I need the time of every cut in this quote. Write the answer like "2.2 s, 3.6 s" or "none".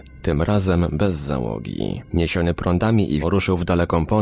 2.1 s, 3.2 s

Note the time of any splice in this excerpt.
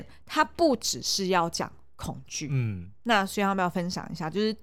none

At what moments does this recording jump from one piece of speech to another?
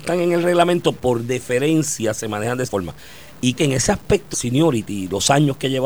0.9 s, 2.7 s, 3.6 s, 4.3 s

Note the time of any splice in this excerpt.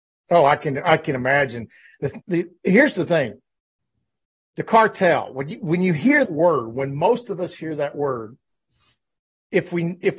2.2 s, 6.3 s

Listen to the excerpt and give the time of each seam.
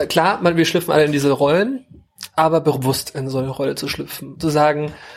none

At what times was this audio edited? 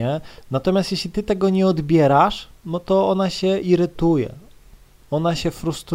2.6 s

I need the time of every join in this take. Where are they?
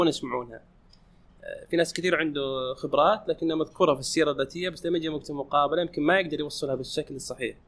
none

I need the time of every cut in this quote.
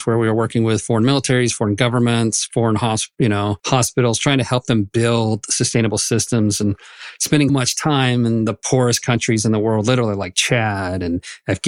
3.6 s, 7.5 s

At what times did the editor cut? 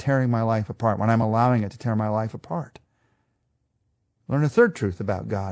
none

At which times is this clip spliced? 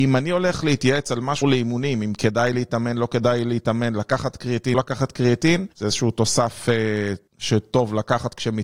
1.4 s, 4.7 s, 5.7 s, 7.3 s

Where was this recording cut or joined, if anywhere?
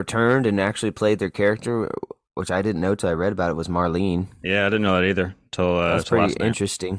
none

